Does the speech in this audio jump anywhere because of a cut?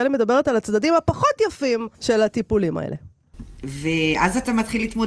yes; 1 cut; at 1.9 s

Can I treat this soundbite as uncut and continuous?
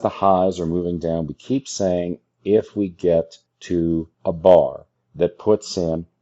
no; 1 cut; at 4.1 s

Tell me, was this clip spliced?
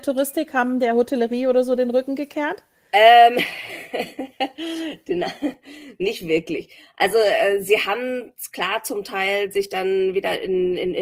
no; 0 cuts

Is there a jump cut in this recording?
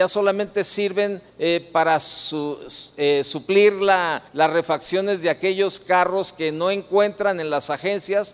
yes; 2 cuts; at 1.3 s, 4.3 s

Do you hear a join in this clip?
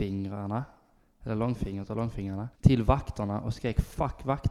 yes; 1 cut; at 2.5 s

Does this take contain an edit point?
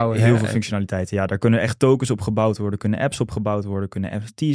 no; 0 cuts

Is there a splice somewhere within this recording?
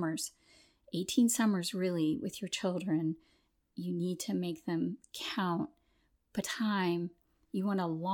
yes; 1 cut; at 6.4 s

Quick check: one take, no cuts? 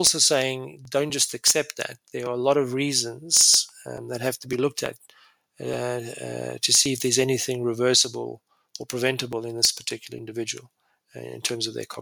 yes; 0 cuts

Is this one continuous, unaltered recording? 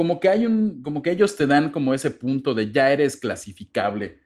yes; 0 cuts

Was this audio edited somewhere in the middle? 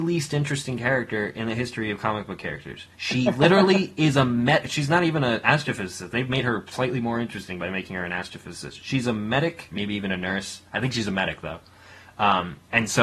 yes; 2 cuts; at 2.9 s, 9.7 s

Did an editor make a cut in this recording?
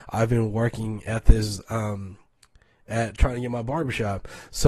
no; 0 cuts

